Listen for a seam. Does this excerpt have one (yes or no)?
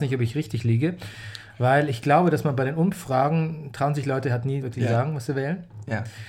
yes